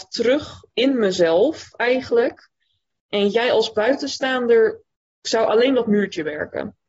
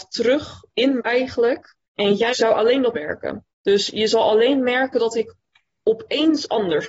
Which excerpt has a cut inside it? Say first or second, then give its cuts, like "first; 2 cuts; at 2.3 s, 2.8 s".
second; 5 cuts; at 1.0 s, 1.8 s, 2.3 s, 2.9 s, 3.5 s